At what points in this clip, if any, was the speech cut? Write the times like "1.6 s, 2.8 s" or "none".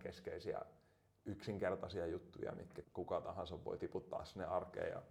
2.8 s